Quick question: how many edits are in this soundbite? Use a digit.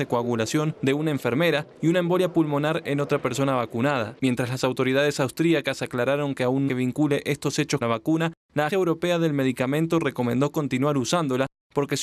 3